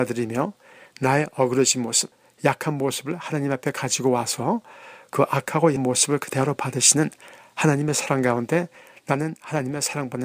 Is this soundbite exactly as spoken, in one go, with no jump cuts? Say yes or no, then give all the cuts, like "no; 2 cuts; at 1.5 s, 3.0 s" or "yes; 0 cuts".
no; 1 cut; at 5.8 s